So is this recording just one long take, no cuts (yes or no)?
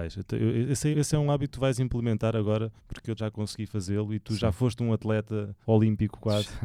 no